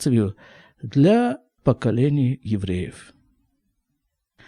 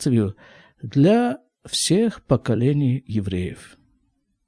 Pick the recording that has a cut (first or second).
first